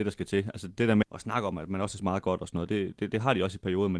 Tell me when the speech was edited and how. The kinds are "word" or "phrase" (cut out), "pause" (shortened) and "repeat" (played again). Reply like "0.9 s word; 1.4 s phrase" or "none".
1.0 s word; 2.0 s word